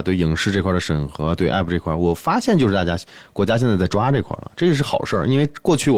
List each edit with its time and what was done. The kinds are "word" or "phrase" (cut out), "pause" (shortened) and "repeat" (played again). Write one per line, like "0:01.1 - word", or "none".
none